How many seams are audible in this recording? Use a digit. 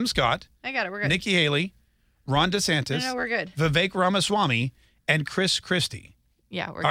0